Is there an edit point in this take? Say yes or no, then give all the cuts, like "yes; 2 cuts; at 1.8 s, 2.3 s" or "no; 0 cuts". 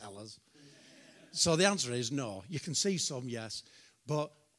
no; 0 cuts